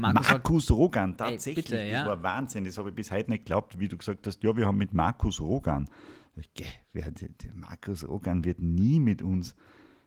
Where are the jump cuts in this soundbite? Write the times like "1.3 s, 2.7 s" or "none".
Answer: none